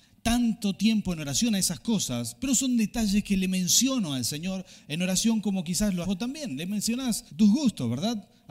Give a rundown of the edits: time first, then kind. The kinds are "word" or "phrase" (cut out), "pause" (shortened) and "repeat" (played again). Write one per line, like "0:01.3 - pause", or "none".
0:06.0 - word
0:07.3 - pause